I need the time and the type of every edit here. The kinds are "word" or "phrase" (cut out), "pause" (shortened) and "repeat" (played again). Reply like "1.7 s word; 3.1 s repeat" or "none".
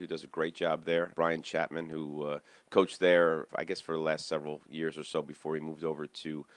none